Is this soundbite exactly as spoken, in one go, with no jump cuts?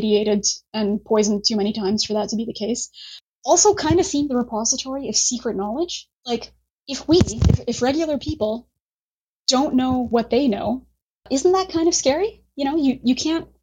no; 2 cuts; at 4.3 s, 6.2 s

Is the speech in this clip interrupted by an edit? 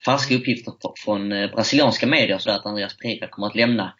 yes; 1 cut; at 2.5 s

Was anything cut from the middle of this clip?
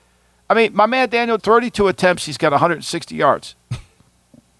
yes; 1 cut; at 1.4 s

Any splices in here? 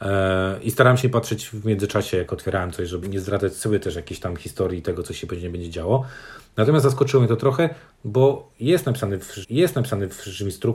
yes; 3 cuts; at 1.0 s, 3.0 s, 9.4 s

